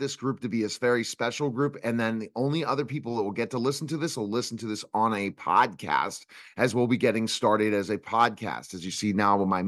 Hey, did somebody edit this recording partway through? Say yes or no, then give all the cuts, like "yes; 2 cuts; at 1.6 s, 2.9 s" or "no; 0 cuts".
no; 0 cuts